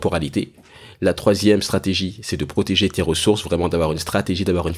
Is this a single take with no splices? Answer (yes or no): yes